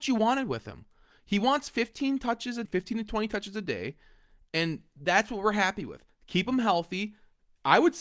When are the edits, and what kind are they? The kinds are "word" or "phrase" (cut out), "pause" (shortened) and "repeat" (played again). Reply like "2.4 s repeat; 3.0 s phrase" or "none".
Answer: 2.7 s word